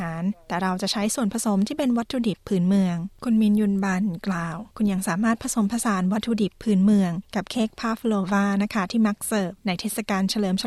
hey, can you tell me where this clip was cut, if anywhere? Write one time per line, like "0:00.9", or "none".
0:04.7